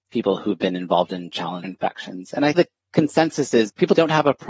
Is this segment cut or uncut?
cut